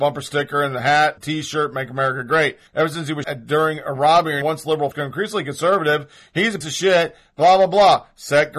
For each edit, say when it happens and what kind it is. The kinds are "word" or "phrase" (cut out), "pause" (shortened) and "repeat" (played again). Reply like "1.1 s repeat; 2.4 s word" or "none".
1.2 s phrase; 2.7 s pause; 3.2 s word; 4.4 s phrase; 4.9 s word; 6.6 s word

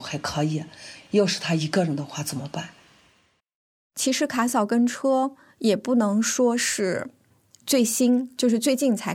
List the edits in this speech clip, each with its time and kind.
3.4 s pause

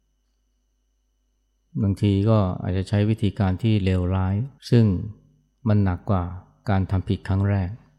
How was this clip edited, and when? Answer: 4.6 s pause

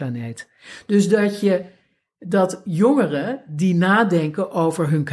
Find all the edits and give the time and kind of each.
none

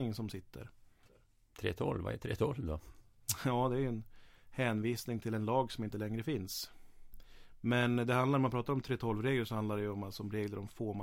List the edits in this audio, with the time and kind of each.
none

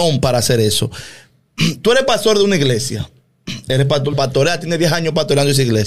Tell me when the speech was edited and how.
4.1 s phrase

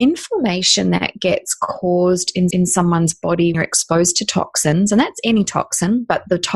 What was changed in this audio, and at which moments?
2.5 s repeat; 3.5 s word

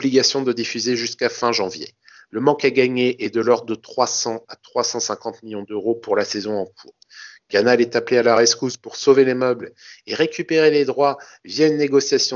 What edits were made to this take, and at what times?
none

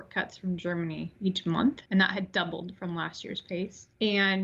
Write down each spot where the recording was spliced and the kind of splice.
1.9 s pause

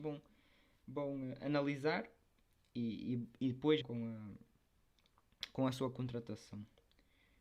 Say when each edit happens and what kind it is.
3.8 s word

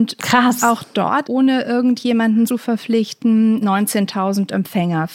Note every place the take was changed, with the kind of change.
1.2 s word; 2.5 s word; 3.6 s word

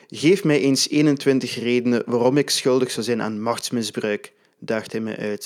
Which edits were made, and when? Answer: none

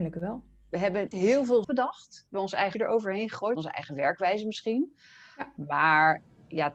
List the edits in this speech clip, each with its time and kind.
1.1 s word; 1.6 s word; 2.3 s word; 2.7 s word; 3.6 s word

